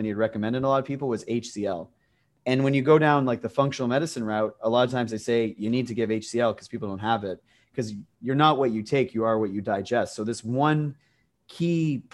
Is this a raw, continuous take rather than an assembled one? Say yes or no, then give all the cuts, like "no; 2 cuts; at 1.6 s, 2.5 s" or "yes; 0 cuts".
yes; 0 cuts